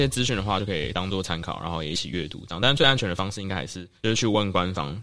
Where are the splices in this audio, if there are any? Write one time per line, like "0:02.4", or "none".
0:04.0